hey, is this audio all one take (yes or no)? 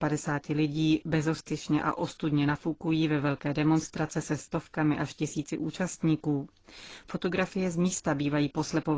yes